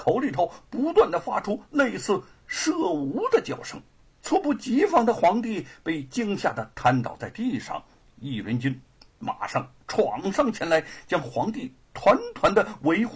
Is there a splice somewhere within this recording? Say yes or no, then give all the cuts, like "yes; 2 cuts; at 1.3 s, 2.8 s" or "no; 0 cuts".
yes; 1 cut; at 3.9 s